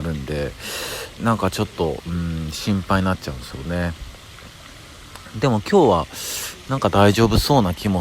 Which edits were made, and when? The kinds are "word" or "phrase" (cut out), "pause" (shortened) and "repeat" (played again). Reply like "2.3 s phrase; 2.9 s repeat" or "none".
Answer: 1.2 s word